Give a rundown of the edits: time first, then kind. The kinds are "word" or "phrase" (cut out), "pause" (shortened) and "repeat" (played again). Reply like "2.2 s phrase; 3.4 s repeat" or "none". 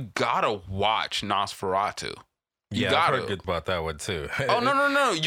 3.4 s word